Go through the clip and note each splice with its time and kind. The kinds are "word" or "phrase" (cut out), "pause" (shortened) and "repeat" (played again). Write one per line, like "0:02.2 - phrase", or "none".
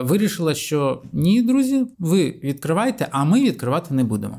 0:01.9 - pause

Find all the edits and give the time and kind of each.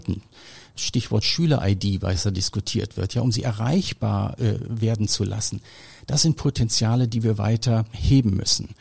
none

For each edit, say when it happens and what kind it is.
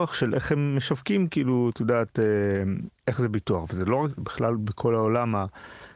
0:03.0 - word
0:04.1 - word

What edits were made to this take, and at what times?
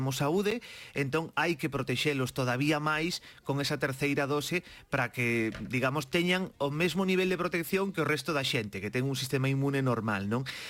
none

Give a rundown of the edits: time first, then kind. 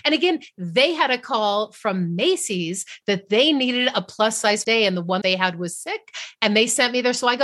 0:04.6 - phrase
0:05.2 - word

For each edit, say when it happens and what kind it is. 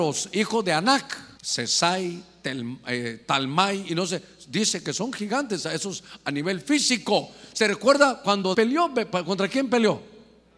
0:01.4 - pause
0:08.5 - word

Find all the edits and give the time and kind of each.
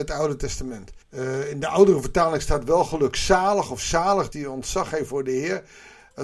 0:01.0 - pause
0:04.3 - word

